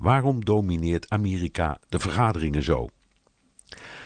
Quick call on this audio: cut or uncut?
uncut